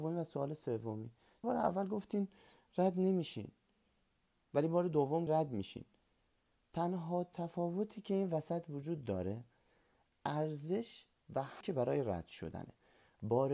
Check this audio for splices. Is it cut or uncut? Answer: cut